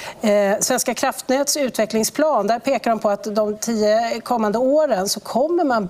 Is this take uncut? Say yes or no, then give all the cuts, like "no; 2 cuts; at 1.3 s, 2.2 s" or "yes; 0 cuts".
yes; 0 cuts